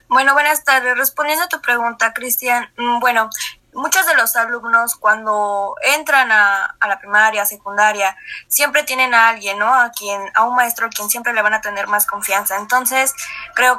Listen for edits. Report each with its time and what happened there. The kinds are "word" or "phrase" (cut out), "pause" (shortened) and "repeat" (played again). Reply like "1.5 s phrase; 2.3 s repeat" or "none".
3.6 s word